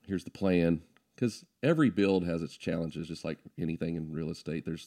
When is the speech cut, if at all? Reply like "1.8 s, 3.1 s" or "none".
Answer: none